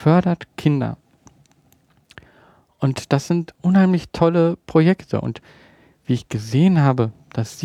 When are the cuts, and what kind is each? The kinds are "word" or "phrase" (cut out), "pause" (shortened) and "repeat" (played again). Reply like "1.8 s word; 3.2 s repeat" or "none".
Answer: none